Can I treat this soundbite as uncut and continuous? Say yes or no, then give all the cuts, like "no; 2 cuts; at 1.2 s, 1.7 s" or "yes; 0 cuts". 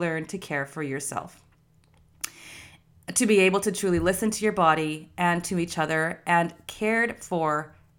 yes; 0 cuts